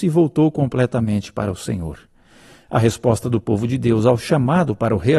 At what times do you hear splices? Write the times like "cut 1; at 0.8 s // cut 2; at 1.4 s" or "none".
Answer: none

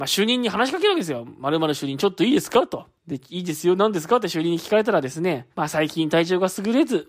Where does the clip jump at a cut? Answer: cut 1; at 3.0 s // cut 2; at 5.5 s

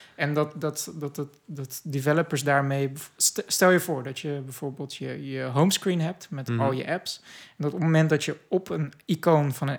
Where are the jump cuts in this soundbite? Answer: none

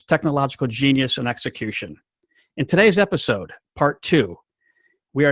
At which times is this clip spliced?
none

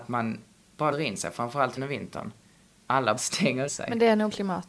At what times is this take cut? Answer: cut 1; at 0.9 s // cut 2; at 1.8 s // cut 3; at 3.2 s // cut 4; at 3.7 s

